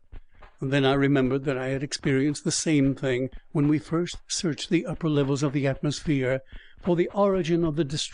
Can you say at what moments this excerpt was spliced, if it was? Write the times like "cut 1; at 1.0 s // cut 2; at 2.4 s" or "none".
none